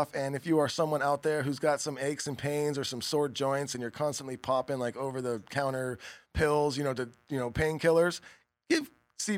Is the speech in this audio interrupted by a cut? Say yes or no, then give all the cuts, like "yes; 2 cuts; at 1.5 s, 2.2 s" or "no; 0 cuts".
no; 0 cuts